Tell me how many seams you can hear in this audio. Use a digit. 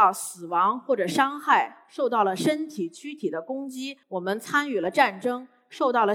1